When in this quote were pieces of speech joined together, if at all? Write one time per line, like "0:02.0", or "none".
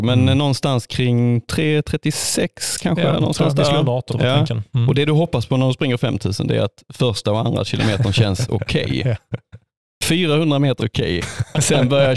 0:04.1
0:10.8

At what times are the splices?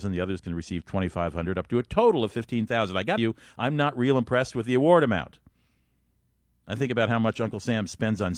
0:03.2

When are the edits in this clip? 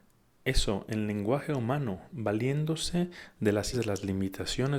0:03.7

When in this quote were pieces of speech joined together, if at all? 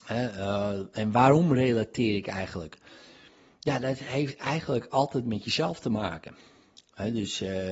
none

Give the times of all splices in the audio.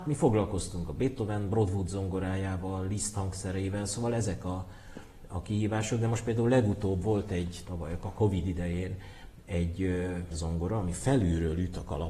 0:07.6
0:10.3

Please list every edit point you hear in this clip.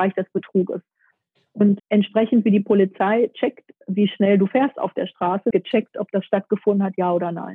0:01.8
0:05.5

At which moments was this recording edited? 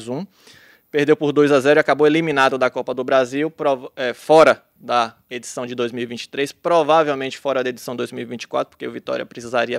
none

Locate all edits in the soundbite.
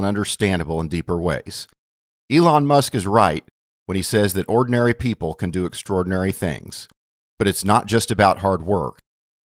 none

